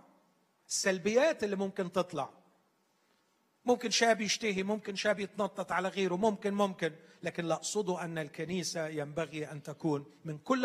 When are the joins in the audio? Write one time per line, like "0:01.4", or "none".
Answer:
none